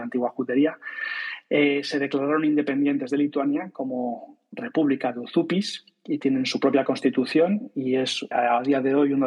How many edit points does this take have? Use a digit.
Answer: 1